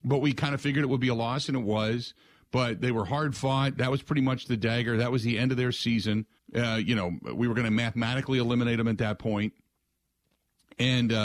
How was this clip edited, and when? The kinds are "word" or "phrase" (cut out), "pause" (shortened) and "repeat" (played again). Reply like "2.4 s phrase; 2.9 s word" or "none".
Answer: 6.4 s pause